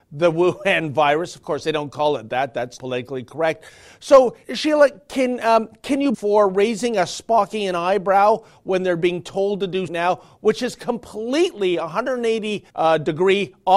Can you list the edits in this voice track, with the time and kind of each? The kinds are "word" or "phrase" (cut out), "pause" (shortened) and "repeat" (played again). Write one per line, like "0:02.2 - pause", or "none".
0:02.8 - word
0:04.4 - pause
0:06.1 - phrase
0:09.9 - phrase
0:12.7 - pause

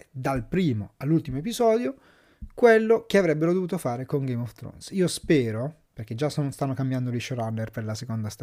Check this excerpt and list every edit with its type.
none

